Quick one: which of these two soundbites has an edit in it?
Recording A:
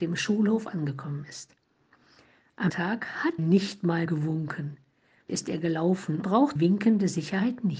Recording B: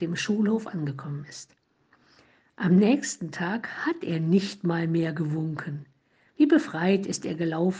A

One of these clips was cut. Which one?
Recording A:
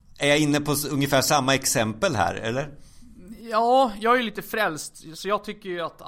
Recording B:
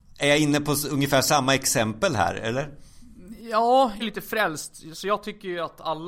B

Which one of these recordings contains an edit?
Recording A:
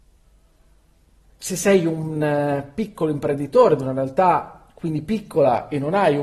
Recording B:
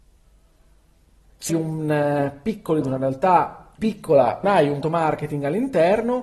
B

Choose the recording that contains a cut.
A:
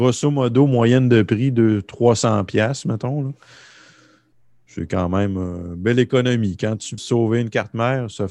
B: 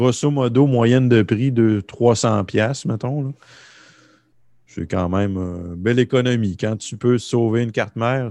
A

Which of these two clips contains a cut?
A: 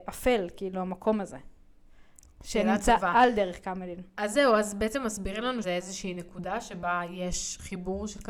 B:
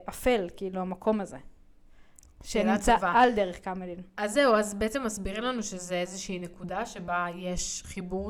A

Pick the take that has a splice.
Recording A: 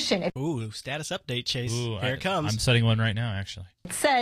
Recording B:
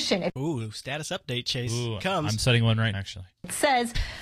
B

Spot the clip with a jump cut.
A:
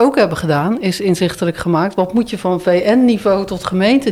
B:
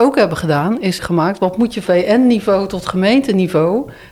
B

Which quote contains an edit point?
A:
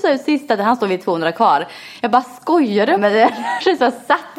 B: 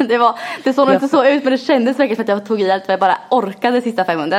A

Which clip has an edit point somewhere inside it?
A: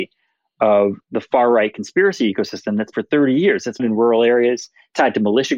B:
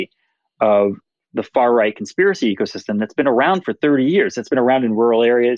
A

